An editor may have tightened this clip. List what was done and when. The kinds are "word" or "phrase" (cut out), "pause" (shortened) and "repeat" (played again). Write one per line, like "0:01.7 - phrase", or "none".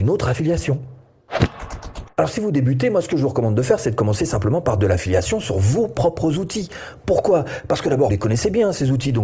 0:02.1 - pause
0:08.1 - word